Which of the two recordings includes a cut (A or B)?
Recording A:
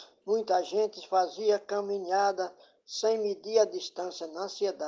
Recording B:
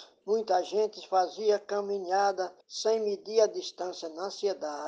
B